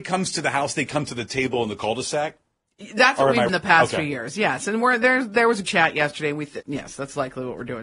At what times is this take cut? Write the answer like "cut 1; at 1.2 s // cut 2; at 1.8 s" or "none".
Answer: cut 1; at 3.5 s // cut 2; at 5.6 s // cut 3; at 6.6 s